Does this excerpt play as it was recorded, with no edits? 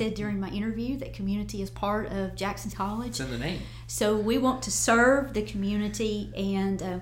no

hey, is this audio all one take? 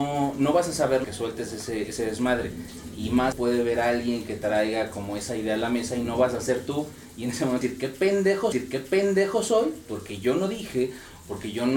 no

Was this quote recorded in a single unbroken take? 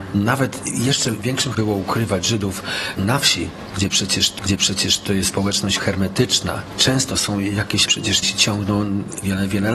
no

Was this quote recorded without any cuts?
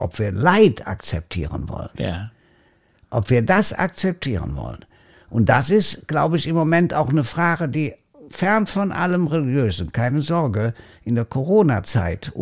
yes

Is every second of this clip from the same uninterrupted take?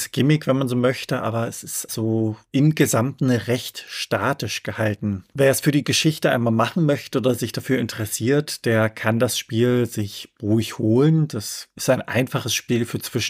no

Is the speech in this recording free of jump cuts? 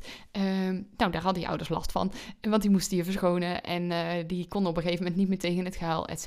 yes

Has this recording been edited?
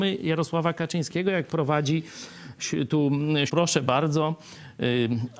yes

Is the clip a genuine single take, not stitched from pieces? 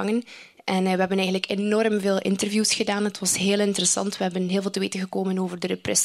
yes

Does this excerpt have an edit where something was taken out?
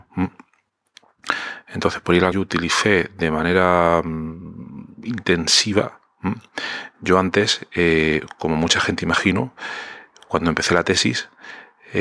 yes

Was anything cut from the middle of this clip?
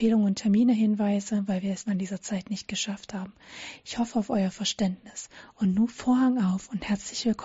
yes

